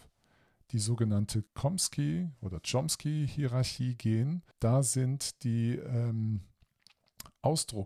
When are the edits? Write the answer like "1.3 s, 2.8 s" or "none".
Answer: 1.5 s, 4.5 s